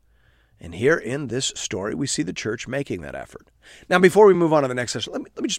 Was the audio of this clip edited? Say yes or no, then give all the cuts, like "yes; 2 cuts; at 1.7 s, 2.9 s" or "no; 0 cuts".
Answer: no; 0 cuts